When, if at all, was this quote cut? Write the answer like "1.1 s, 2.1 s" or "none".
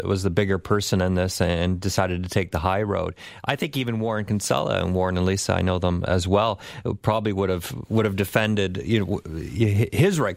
6.1 s